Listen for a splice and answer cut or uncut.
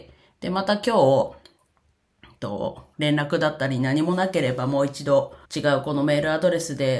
cut